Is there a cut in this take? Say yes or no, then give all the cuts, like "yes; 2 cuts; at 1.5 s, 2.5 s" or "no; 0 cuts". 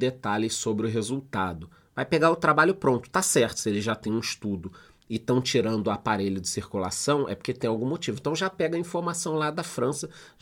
no; 0 cuts